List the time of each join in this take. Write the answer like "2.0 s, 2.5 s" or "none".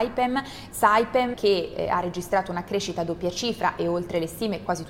1.3 s